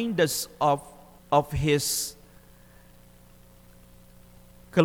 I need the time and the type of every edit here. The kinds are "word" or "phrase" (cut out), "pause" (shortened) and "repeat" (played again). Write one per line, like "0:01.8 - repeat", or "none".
0:01.2 - pause